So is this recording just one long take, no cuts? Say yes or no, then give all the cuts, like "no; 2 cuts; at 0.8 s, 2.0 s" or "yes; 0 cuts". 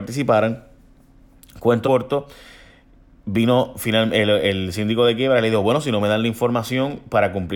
no; 1 cut; at 1.8 s